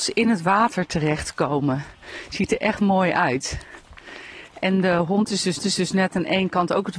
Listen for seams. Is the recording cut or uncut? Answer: cut